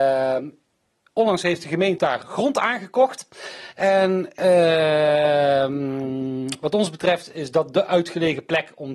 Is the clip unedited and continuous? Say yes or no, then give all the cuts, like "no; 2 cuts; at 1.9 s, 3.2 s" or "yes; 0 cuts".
no; 1 cut; at 2.0 s